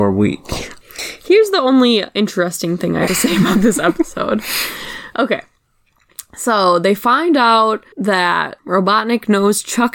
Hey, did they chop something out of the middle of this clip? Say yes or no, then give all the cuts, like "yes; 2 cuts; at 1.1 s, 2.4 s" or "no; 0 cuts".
yes; 2 cuts; at 3.1 s, 7.9 s